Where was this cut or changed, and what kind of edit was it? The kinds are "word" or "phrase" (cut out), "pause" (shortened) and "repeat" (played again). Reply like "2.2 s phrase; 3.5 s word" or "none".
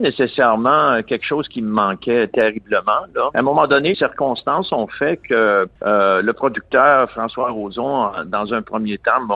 3.3 s phrase; 3.9 s word; 5.8 s pause